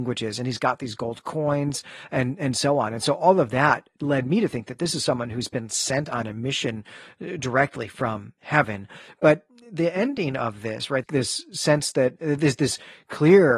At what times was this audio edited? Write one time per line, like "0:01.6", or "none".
0:11.0